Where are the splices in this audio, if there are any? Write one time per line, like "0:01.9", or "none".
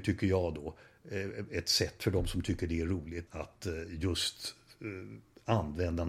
0:03.3

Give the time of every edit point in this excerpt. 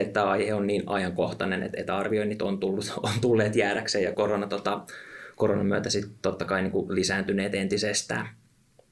0:04.1

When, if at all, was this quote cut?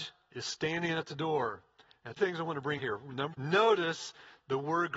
0:02.2
0:02.8
0:03.3

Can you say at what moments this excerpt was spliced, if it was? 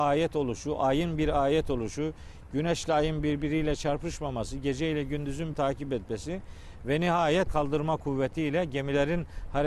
0:05.5
0:07.5

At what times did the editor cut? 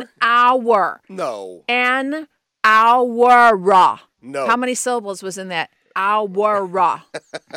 none

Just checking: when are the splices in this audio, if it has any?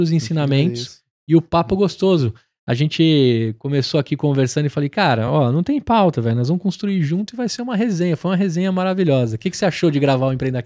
none

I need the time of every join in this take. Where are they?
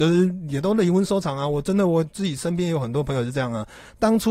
none

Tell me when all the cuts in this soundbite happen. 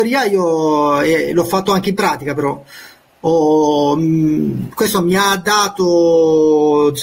none

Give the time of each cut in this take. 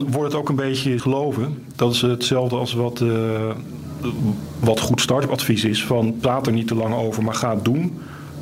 0:01.0

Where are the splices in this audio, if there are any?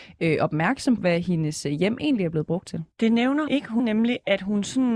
0:01.0
0:02.9
0:03.5
0:03.8

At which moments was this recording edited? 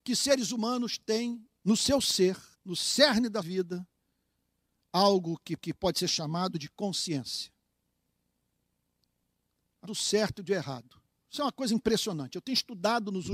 0:01.6
0:02.5
0:03.4
0:05.6
0:09.8

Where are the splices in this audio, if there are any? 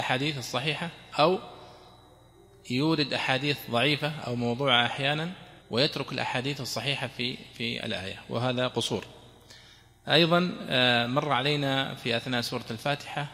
0:05.6

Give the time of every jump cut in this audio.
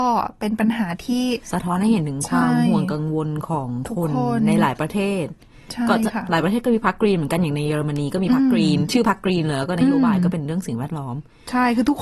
0:01.4

